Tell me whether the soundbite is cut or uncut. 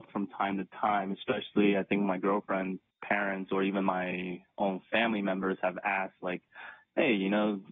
cut